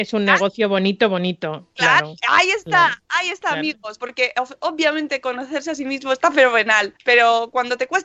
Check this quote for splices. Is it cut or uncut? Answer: cut